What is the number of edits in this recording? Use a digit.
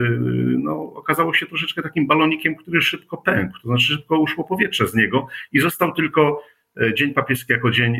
0